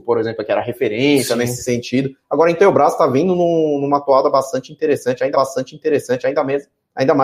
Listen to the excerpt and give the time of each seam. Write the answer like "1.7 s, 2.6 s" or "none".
5.3 s